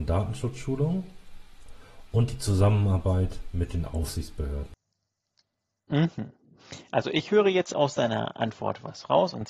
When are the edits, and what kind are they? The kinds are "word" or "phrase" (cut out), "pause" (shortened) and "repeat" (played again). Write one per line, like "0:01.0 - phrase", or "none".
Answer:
none